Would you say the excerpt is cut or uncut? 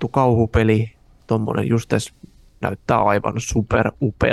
uncut